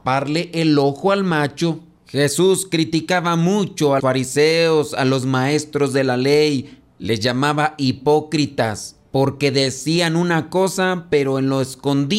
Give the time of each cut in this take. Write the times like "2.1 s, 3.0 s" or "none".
4.0 s